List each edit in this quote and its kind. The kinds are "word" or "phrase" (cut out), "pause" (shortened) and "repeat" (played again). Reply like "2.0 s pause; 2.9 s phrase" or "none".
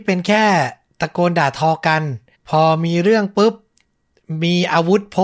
2.3 s pause